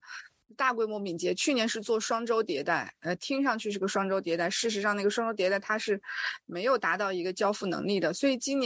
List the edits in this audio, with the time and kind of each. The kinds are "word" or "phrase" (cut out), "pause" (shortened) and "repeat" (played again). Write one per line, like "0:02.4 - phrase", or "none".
none